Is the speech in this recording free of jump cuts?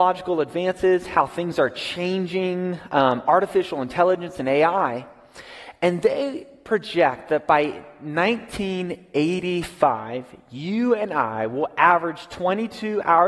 yes; 0 cuts

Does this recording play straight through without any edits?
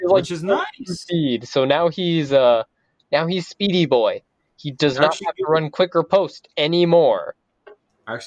yes; 0 cuts

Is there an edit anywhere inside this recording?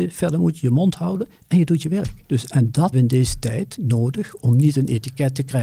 yes; 2 cuts; at 2.2 s, 2.9 s

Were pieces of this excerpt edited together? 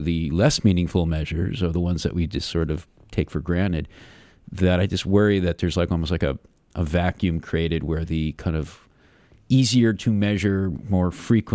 no; 0 cuts

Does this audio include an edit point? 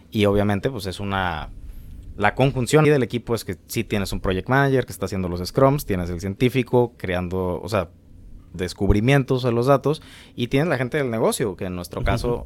yes; 3 cuts; at 2.8 s, 7.0 s, 8.5 s

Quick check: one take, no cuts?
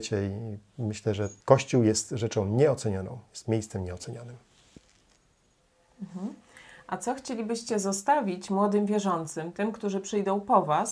no; 1 cut; at 1.4 s

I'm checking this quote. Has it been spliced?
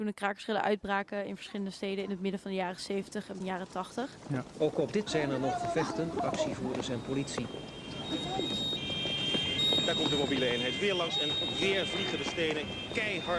yes; 3 cuts; at 3.4 s, 5.1 s, 6.1 s

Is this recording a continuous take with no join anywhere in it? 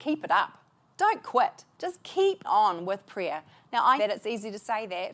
no; 3 cuts; at 1.7 s, 2.4 s, 4.0 s

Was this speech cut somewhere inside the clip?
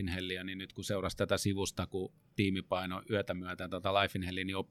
no; 0 cuts

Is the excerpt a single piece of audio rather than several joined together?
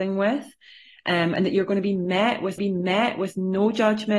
no; 1 cut; at 2.6 s

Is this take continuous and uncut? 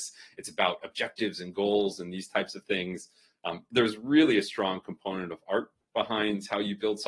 yes; 0 cuts

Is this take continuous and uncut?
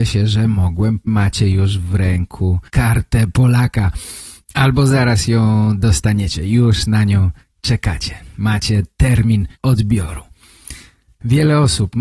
no; 4 cuts; at 1.1 s, 2.7 s, 4.4 s, 9.6 s

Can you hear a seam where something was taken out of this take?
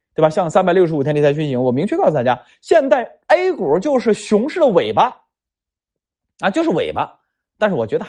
no; 0 cuts

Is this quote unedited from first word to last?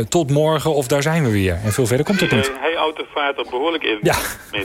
yes; 0 cuts

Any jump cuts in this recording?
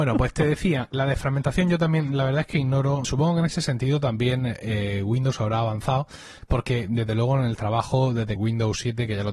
yes; 3 cuts; at 0.9 s, 3.0 s, 8.4 s

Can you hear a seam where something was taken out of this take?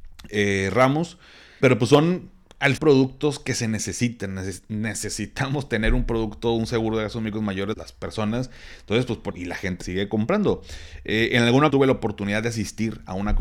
yes; 6 cuts; at 1.6 s, 2.8 s, 7.7 s, 9.3 s, 9.8 s, 11.7 s

